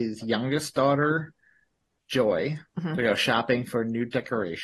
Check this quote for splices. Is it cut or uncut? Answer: cut